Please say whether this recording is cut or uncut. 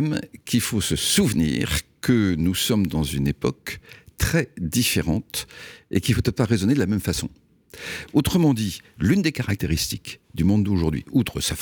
cut